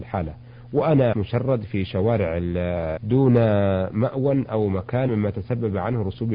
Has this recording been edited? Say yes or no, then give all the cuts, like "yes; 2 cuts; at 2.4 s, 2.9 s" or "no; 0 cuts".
yes; 3 cuts; at 1.1 s, 3.0 s, 5.1 s